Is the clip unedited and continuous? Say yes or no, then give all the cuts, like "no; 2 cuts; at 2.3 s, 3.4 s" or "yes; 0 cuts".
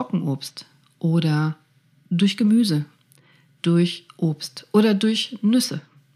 yes; 0 cuts